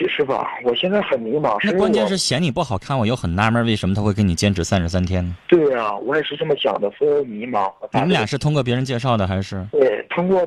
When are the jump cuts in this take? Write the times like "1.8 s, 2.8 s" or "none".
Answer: 5.4 s